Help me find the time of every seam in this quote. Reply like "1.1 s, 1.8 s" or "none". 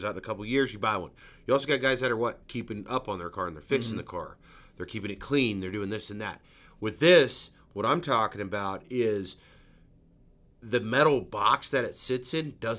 2.4 s